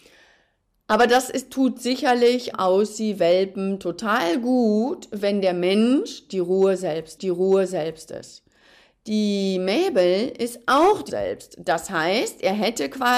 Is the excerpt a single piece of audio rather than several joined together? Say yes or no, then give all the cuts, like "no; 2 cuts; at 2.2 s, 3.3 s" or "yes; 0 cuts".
no; 3 cuts; at 2.5 s, 7.2 s, 11.1 s